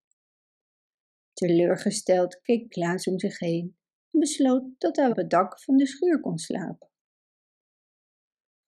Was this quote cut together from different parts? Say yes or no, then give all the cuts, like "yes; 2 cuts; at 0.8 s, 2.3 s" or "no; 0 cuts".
yes; 2 cuts; at 2.7 s, 5.1 s